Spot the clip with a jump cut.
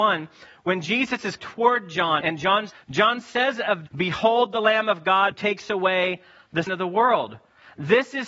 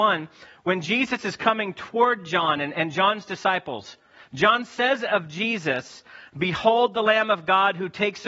first; 6 cuts; at 1.4 s, 2.2 s, 2.7 s, 3.9 s, 5.3 s, 6.7 s

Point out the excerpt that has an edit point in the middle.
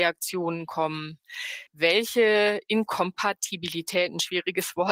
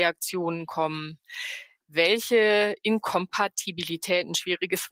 first; 1 cut; at 1.7 s

